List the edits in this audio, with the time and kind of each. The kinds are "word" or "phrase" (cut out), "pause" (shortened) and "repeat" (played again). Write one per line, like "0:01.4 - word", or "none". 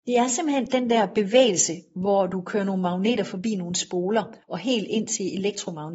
0:04.4 - pause

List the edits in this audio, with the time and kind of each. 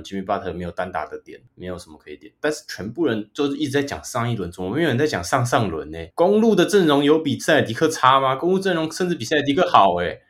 0:06.1 - pause

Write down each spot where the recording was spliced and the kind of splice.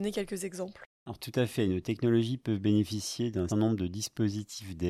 0:00.9 - pause
0:03.5 - word

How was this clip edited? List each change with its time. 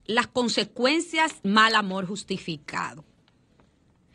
0:01.4 - word

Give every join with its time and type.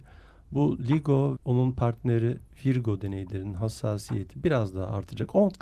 0:01.4 - word

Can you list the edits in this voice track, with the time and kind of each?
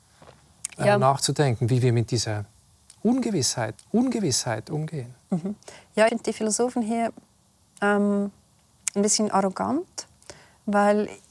0:03.8 - repeat
0:06.1 - word

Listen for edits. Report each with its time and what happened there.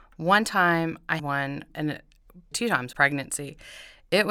0:01.2 - word
0:01.7 - word
0:02.5 - word
0:02.9 - word

